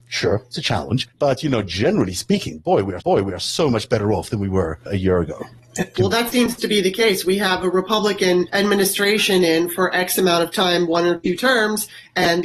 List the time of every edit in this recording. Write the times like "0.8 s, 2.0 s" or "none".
1.1 s, 3.0 s